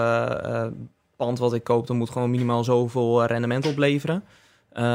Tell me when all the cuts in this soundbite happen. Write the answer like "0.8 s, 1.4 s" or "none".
none